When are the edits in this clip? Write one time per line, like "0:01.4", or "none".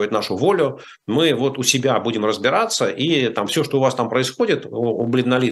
none

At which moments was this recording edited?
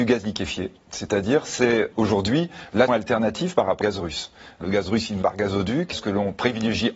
0:01.9
0:02.9
0:03.8
0:04.6
0:05.2
0:05.9

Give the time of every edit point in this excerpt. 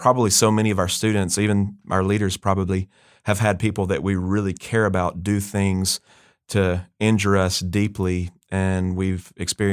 none

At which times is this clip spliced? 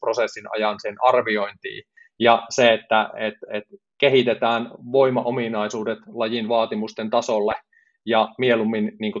none

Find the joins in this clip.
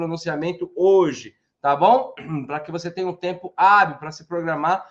none

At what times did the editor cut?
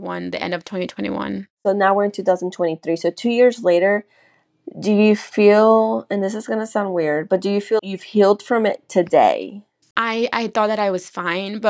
0:01.5
0:07.8
0:09.8

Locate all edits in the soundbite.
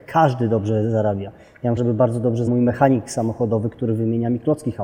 0:01.8
0:02.5

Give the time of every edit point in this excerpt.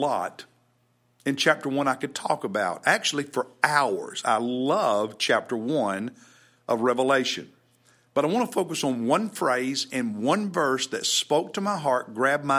none

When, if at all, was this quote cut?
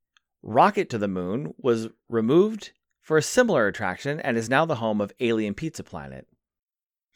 none

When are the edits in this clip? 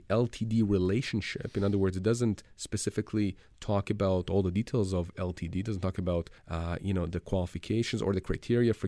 0:06.4

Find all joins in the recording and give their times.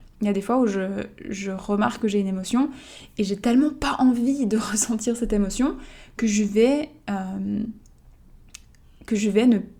none

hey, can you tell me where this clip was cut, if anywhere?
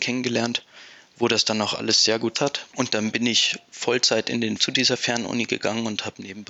0:02.3
0:04.6

